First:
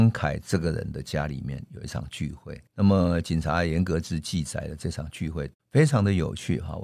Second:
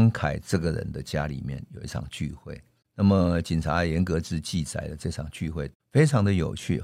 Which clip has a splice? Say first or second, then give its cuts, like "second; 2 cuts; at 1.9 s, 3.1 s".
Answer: first; 1 cut; at 2.7 s